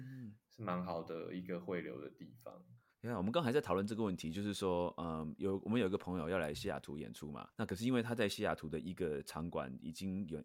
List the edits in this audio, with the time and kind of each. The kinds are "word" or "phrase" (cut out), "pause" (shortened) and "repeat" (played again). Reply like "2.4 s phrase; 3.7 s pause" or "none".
2.9 s pause; 7.5 s pause